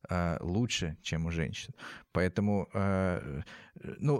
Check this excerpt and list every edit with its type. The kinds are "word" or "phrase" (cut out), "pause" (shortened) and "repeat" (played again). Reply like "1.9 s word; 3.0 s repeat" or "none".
none